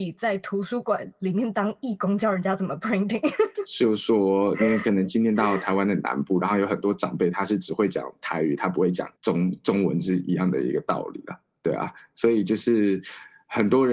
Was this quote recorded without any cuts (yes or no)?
no